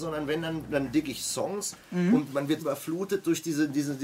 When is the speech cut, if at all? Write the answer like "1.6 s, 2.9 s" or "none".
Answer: 2.6 s